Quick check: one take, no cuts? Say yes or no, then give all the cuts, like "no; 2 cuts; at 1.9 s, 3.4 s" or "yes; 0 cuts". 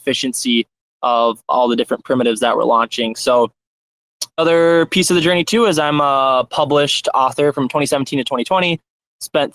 no; 1 cut; at 4.4 s